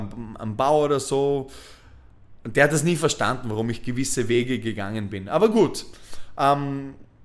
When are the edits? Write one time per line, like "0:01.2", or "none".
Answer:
none